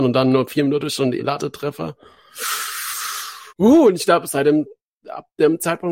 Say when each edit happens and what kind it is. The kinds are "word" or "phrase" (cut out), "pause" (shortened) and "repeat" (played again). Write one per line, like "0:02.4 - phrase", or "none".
0:01.2 - word
0:03.5 - pause